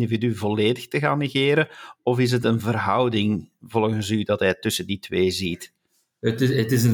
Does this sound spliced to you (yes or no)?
no